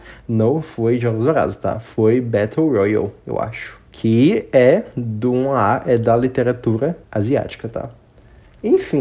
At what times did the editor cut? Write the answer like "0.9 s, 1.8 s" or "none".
3.9 s, 7.0 s